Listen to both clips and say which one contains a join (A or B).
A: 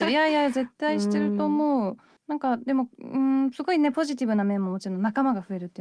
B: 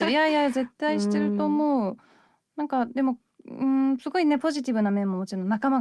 A